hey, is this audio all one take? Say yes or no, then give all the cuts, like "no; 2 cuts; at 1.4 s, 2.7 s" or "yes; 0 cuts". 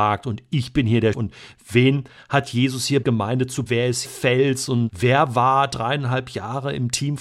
no; 5 cuts; at 1.1 s, 3.0 s, 3.7 s, 4.0 s, 4.9 s